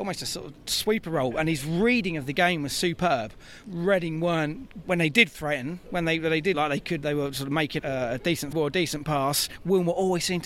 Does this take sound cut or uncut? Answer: cut